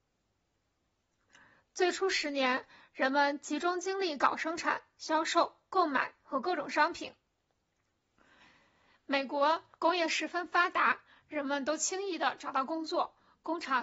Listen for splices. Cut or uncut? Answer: uncut